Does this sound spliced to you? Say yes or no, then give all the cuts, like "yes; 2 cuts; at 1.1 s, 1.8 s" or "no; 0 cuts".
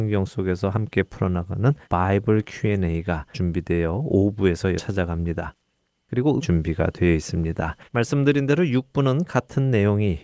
yes; 5 cuts; at 1.8 s, 3.3 s, 4.8 s, 6.4 s, 7.9 s